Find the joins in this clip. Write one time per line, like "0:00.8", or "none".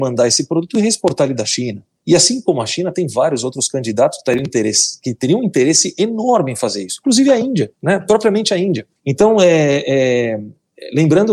0:02.0
0:07.7
0:09.0